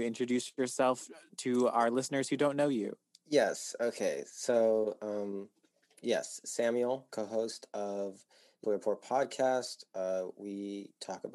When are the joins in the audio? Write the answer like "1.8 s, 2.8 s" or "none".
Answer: 8.6 s